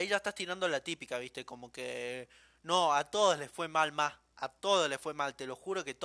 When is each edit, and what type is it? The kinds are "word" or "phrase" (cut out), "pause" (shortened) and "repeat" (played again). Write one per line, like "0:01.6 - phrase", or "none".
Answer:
none